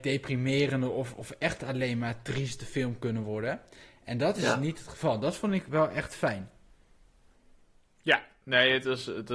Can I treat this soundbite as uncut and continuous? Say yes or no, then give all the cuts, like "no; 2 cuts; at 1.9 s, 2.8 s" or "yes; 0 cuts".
yes; 0 cuts